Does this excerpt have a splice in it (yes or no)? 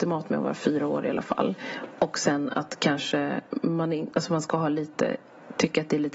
no